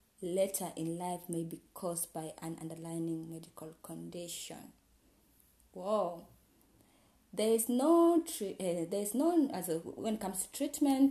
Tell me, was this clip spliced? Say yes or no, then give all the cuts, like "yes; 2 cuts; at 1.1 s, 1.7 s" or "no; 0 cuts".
no; 0 cuts